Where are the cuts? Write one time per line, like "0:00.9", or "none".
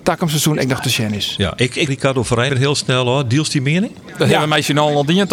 0:01.9
0:02.5